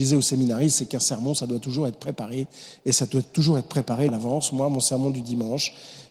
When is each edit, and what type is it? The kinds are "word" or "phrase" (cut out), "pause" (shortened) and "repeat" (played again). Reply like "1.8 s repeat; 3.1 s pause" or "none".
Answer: 4.1 s word

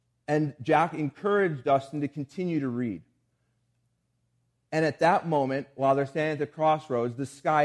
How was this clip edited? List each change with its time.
none

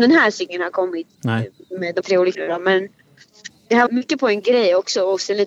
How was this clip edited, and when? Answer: 2.0 s word; 2.3 s word; 3.5 s word; 3.9 s word; 4.4 s word

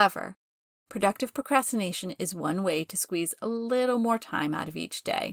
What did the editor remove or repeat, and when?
none

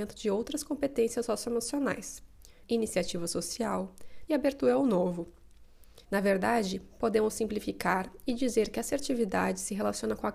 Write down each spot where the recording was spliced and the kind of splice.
2.6 s phrase; 4.3 s phrase; 6.0 s pause

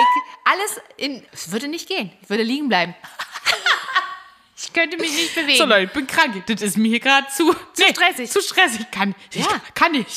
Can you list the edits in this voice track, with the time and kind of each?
1.3 s pause

